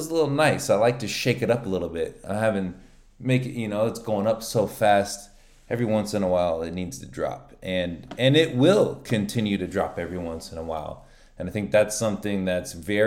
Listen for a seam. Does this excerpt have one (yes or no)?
no